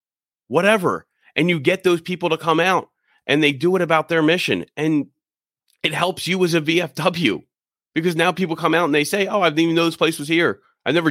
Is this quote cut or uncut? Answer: uncut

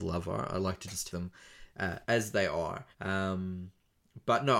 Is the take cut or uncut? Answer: cut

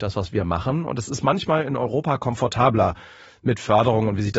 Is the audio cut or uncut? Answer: uncut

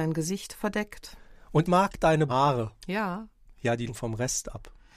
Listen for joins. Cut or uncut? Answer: cut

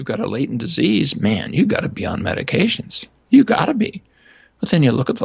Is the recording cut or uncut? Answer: uncut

